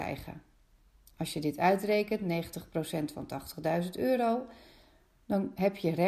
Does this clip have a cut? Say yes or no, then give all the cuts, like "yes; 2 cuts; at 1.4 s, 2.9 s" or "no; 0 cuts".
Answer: no; 0 cuts